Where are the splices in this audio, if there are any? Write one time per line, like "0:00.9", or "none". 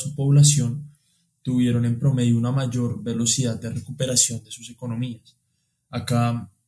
none